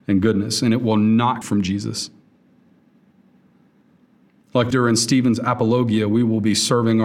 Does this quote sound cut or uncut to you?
cut